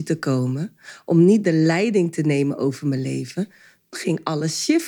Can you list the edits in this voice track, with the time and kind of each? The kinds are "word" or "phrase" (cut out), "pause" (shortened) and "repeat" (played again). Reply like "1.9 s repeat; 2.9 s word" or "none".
3.9 s word